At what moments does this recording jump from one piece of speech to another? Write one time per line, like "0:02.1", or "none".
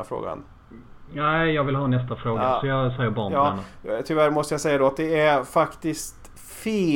none